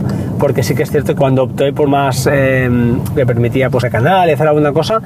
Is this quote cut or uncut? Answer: cut